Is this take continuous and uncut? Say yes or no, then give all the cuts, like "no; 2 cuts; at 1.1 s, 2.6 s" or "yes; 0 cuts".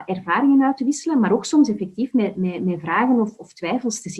yes; 0 cuts